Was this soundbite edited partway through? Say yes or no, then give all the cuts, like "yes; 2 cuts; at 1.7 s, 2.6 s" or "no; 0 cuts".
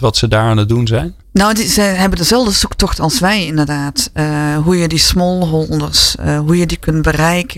yes; 1 cut; at 1.2 s